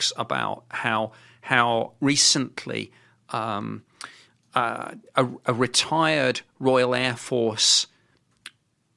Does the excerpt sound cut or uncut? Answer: uncut